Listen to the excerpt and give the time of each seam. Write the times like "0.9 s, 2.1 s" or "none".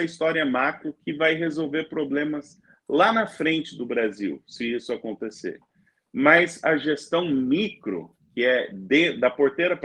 none